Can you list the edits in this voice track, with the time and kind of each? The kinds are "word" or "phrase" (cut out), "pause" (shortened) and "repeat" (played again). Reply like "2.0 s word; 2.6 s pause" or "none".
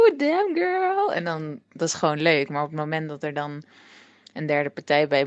none